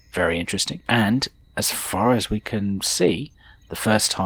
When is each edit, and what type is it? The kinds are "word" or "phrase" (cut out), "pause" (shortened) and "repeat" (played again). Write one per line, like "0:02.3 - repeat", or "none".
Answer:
none